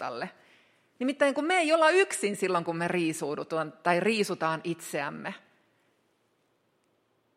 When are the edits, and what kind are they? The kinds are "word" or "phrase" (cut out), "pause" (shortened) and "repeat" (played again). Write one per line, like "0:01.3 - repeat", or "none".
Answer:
none